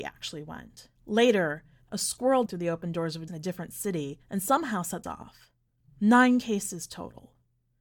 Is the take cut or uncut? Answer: cut